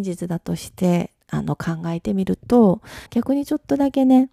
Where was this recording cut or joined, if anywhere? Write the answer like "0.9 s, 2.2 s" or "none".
1.2 s, 3.1 s